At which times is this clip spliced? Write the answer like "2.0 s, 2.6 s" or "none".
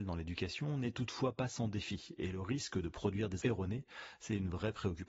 3.4 s